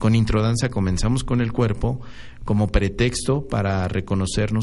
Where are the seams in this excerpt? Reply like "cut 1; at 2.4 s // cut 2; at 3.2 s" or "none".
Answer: none